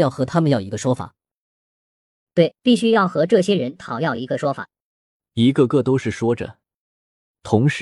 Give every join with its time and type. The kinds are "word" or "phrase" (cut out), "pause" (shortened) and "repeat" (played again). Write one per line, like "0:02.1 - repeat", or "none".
none